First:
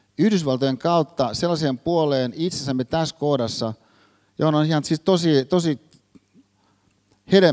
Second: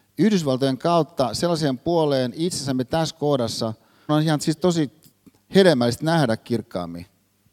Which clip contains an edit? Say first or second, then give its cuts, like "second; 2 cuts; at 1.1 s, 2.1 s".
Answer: second; 3 cuts; at 4.1 s, 4.6 s, 5.3 s